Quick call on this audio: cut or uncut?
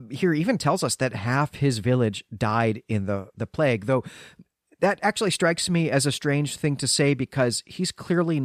uncut